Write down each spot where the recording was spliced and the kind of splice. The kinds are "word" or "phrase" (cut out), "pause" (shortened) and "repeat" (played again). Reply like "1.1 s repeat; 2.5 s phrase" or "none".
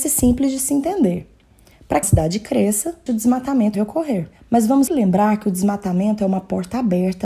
2.0 s word; 3.1 s word; 3.7 s word; 4.9 s word